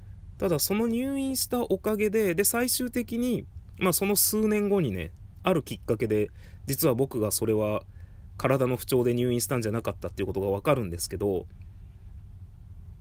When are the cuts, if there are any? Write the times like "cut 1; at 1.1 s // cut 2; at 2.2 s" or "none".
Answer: none